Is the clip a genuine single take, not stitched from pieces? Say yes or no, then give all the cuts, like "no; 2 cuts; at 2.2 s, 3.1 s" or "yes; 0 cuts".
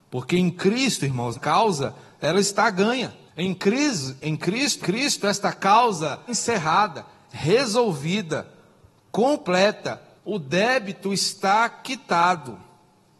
no; 5 cuts; at 1.3 s, 3.3 s, 4.8 s, 6.3 s, 10.2 s